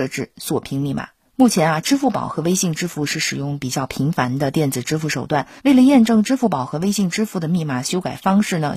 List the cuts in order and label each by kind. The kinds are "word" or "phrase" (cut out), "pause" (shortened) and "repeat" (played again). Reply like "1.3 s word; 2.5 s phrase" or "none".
5.6 s pause